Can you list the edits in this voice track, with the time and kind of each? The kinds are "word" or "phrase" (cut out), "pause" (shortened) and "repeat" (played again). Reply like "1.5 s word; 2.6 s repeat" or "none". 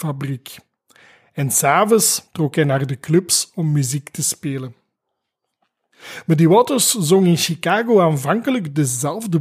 2.3 s pause